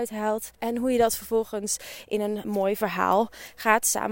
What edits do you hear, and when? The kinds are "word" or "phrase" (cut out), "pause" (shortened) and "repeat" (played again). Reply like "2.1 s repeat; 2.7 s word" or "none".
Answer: 2.4 s word